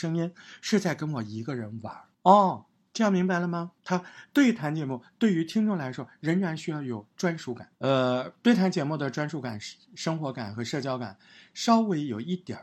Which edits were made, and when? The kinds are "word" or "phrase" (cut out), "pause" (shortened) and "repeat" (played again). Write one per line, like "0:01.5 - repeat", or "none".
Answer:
0:02.1 - pause
0:03.8 - pause
0:07.7 - pause